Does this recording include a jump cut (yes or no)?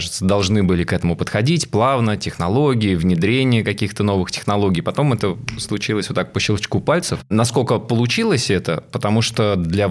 no